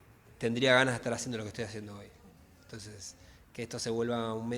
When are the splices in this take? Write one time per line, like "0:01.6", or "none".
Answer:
none